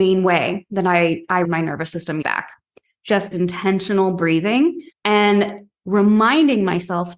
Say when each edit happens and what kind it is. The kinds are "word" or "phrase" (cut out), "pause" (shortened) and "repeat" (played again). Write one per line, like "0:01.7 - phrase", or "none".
0:01.4 - word
0:02.2 - word
0:03.3 - word
0:04.9 - pause